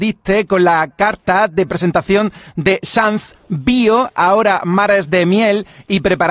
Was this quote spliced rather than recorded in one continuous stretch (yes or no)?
no